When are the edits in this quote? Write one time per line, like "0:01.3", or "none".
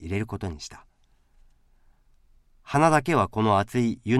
none

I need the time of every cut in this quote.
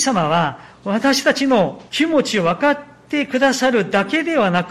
0:01.9

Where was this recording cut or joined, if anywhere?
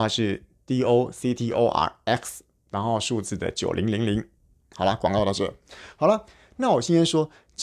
none

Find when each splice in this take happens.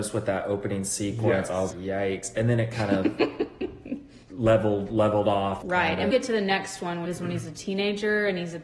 0:01.7
0:04.2
0:05.6
0:06.1
0:07.1

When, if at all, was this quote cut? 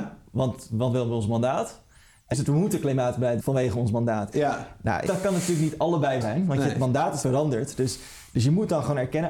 0:02.3
0:03.4
0:05.1
0:06.2
0:07.2

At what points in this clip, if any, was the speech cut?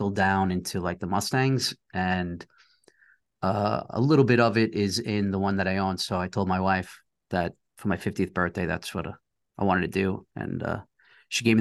none

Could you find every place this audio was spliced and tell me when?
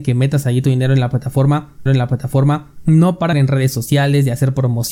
0:01.9
0:03.3

